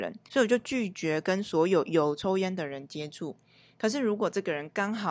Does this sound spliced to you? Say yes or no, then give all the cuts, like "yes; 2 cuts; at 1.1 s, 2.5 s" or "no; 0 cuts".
no; 0 cuts